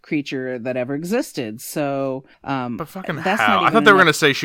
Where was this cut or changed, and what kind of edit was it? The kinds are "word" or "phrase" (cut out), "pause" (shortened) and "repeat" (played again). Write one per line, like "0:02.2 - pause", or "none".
0:02.3 - pause